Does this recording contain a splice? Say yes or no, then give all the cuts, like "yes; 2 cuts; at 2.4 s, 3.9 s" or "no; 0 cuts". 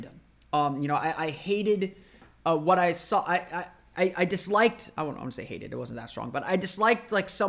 no; 0 cuts